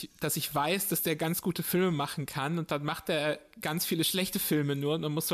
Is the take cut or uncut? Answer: uncut